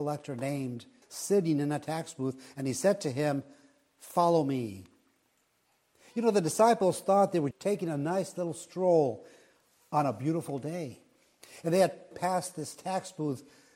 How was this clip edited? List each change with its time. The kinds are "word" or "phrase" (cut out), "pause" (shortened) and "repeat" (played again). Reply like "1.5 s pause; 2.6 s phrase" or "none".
1.0 s word; 7.5 s word; 12.1 s word